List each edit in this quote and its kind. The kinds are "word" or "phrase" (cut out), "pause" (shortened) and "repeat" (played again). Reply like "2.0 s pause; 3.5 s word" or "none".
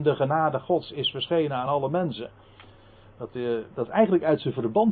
none

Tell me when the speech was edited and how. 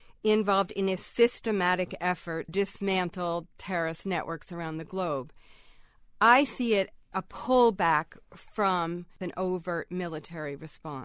2.5 s word; 7.1 s word

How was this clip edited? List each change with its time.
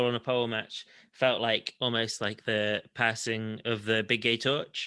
none

